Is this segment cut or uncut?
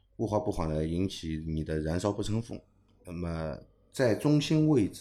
uncut